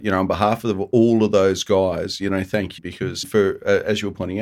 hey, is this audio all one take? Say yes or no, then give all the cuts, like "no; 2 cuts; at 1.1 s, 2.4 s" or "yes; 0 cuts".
no; 2 cuts; at 2.8 s, 3.2 s